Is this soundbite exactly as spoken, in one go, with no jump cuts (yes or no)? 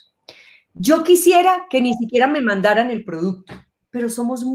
yes